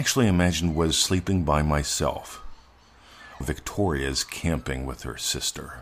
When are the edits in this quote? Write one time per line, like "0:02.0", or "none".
0:03.4

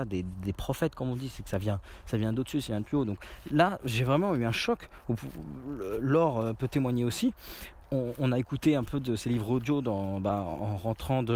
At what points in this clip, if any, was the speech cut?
0:03.8

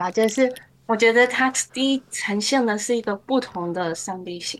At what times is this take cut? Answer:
0:01.7

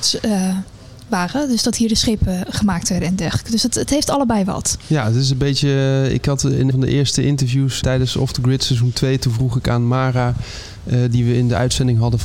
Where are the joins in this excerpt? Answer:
0:06.7
0:07.8

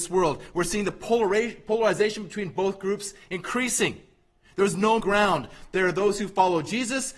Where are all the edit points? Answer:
0:05.0

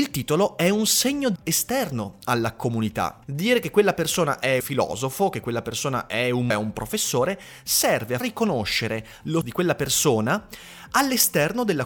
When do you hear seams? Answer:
0:01.4
0:03.2
0:04.6
0:06.5
0:08.2
0:09.4

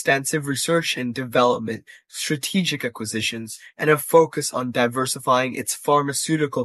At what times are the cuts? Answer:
none

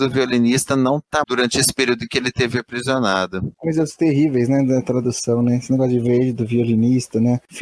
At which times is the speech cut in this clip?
0:01.2

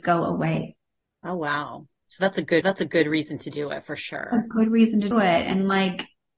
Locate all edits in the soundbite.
0:02.6
0:05.1

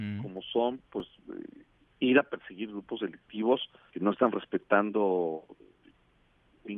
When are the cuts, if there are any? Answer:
0:03.9

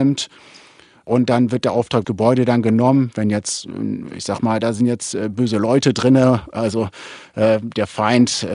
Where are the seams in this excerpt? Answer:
0:02.0

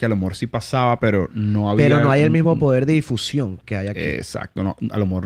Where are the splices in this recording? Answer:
none

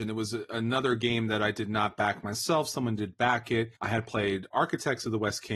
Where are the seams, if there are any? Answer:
0:03.8

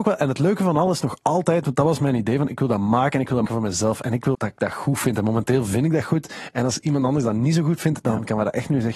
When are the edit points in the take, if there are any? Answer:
0:03.5
0:04.3

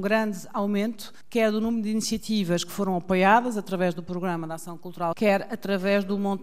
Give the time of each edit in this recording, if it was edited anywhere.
0:05.1

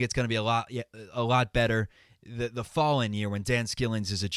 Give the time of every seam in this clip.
none

